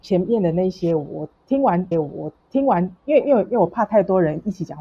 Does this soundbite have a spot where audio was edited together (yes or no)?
yes